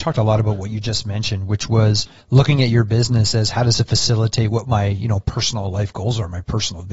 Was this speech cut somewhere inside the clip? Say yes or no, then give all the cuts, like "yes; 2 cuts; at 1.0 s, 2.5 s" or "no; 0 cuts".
no; 0 cuts